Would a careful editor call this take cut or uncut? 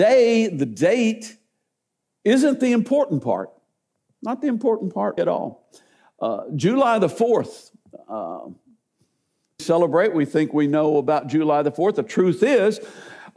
cut